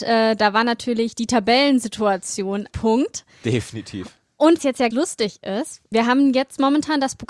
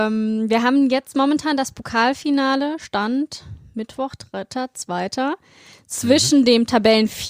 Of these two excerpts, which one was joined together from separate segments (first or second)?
first